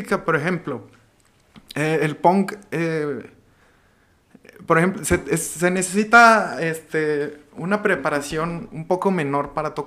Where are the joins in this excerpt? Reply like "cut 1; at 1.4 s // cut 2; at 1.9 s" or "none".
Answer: none